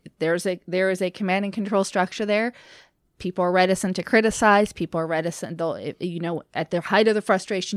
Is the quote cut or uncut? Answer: uncut